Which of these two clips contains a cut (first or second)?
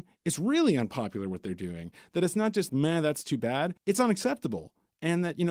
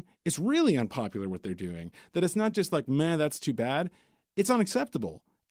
first